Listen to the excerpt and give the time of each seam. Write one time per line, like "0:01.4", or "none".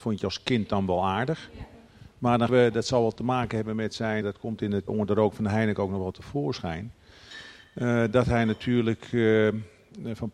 0:02.5
0:04.2
0:04.9